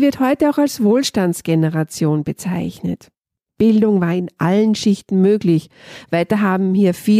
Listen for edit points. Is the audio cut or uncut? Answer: uncut